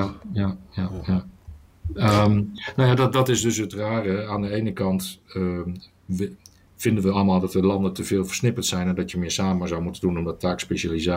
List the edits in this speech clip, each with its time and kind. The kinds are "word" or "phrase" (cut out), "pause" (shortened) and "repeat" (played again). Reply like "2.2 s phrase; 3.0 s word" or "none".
none